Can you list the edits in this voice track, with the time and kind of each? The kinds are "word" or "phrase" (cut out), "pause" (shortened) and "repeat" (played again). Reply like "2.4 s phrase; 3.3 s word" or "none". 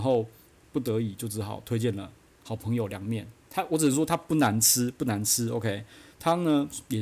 none